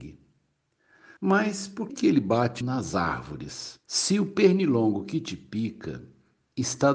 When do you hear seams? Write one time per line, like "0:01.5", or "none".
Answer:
0:01.2
0:01.9
0:02.6
0:03.8